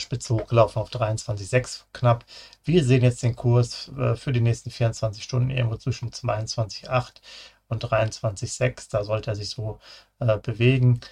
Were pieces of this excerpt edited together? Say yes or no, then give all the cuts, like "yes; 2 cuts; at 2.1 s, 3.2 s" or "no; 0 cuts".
no; 0 cuts